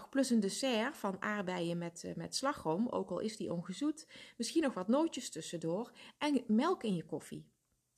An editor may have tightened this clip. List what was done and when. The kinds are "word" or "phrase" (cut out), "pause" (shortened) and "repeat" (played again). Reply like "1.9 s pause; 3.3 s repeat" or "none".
none

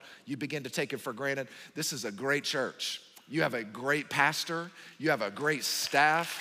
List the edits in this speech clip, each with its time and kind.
none

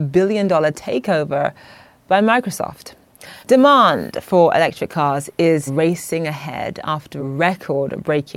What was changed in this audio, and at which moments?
3.4 s pause; 5.7 s word; 7.2 s word

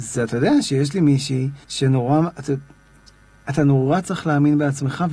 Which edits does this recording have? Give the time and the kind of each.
1.6 s pause

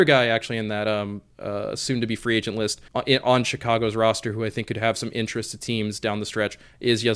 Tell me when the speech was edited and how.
2.9 s pause

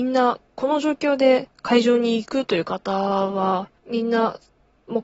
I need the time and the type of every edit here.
1.5 s pause; 3.8 s pause

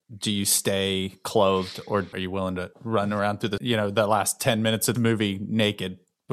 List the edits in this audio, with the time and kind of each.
2.1 s phrase; 2.7 s pause; 3.6 s word; 4.9 s word

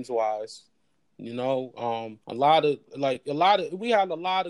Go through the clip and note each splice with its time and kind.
2.2 s pause

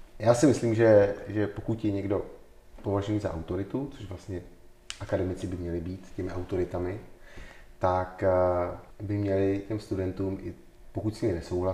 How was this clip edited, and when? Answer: 8.9 s pause

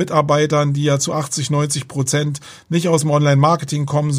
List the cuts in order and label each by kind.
none

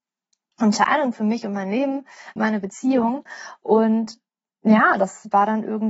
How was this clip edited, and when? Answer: 2.4 s word

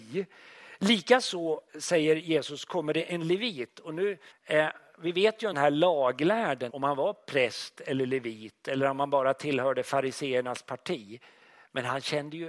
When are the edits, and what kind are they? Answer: 1.7 s pause; 4.3 s pause; 5.5 s phrase; 6.7 s word

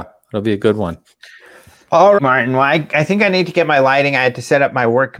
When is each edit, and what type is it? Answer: 2.2 s word

